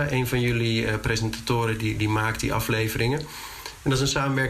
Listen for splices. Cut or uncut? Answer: uncut